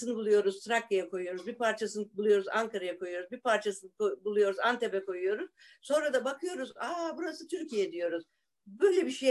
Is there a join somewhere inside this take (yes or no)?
no